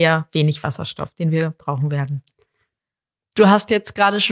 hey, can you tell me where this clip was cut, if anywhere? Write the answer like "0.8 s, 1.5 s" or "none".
none